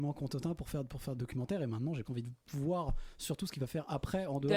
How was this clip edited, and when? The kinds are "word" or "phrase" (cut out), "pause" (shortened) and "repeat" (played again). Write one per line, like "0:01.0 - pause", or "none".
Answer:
0:01.2 - phrase
0:02.0 - word